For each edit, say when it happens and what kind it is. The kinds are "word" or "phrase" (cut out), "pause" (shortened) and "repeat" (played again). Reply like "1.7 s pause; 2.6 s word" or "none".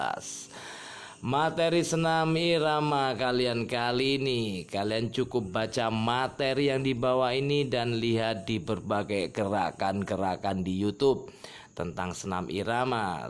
none